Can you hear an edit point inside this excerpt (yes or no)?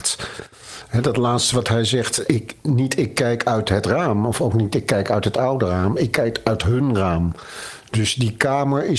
yes